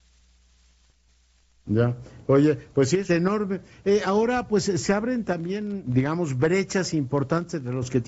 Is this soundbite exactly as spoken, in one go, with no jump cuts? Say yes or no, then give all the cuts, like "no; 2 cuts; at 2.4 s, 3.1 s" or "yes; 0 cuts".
no; 1 cut; at 3.1 s